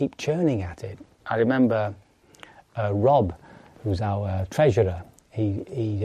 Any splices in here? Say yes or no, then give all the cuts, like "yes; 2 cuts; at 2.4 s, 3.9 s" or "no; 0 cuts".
no; 0 cuts